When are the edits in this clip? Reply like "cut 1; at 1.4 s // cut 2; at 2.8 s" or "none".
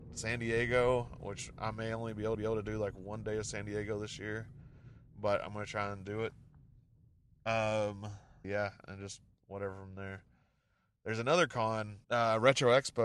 cut 1; at 2.3 s // cut 2; at 8.4 s // cut 3; at 12.0 s